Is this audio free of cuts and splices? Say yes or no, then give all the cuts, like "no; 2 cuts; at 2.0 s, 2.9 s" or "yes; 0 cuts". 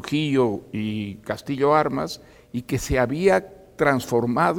no; 1 cut; at 2.3 s